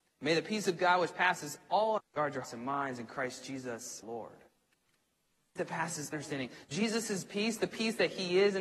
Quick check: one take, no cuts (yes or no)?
no